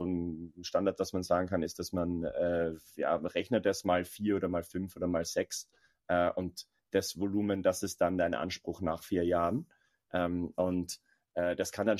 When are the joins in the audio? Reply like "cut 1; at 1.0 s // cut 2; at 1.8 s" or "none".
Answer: none